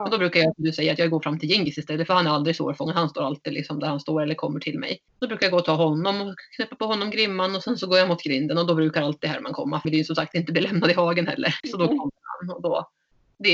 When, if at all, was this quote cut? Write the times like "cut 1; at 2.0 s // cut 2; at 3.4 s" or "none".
cut 1; at 5.1 s // cut 2; at 9.8 s